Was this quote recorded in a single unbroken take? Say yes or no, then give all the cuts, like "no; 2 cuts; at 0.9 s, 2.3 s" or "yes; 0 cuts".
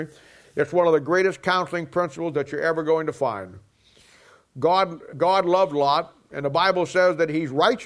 no; 1 cut; at 5.1 s